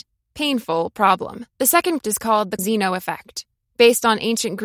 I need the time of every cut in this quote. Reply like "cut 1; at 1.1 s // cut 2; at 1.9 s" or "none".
cut 1; at 1.5 s // cut 2; at 2.0 s // cut 3; at 2.6 s // cut 4; at 3.6 s